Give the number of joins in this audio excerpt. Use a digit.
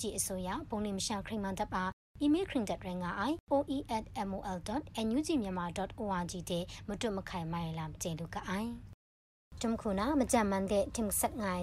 2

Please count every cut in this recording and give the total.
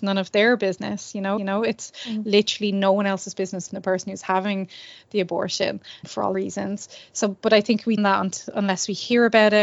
5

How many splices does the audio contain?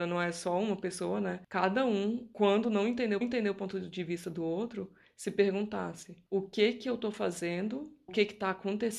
2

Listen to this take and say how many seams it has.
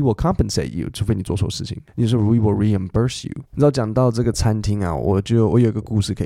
2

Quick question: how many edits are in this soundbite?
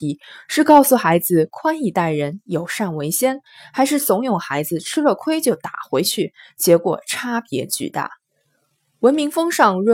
0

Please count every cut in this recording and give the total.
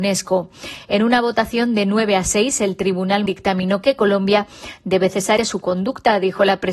2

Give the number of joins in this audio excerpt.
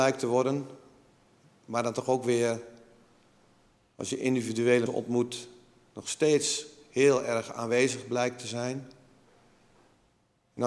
1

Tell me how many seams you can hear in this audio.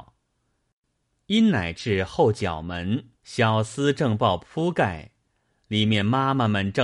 1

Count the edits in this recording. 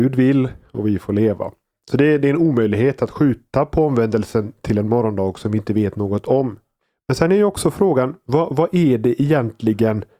0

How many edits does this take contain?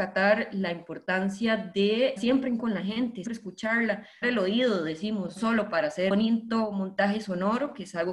6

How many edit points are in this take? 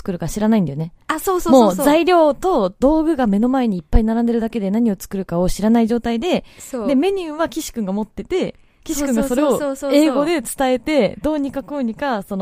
0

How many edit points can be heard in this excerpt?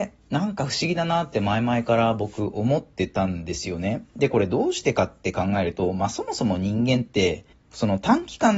1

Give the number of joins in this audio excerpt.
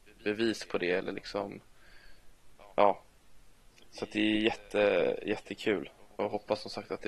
0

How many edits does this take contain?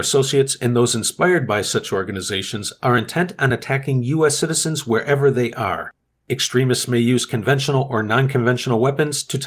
0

